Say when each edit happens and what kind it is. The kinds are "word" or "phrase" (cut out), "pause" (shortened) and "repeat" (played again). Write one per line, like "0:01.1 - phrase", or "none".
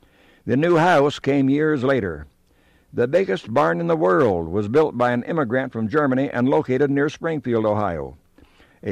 none